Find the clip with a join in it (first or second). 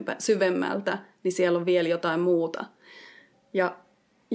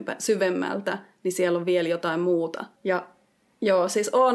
second